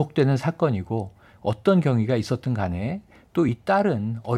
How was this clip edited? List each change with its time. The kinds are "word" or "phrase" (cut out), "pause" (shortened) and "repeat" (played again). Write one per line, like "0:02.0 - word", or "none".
none